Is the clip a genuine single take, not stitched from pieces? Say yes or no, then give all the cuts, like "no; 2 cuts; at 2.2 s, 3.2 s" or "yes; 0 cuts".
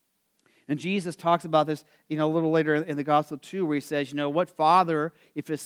yes; 0 cuts